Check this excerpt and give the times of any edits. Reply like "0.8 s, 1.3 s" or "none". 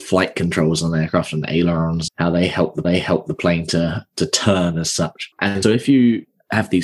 2.1 s, 2.8 s, 5.6 s